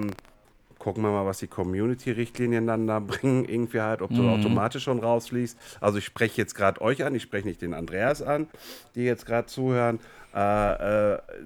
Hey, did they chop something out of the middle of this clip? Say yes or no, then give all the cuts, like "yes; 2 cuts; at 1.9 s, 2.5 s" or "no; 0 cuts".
no; 0 cuts